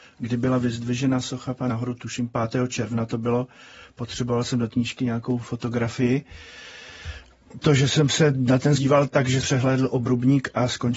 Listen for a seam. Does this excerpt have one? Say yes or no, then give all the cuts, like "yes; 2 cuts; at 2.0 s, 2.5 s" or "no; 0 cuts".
yes; 5 cuts; at 1.7 s, 4.7 s, 7.6 s, 8.8 s, 9.4 s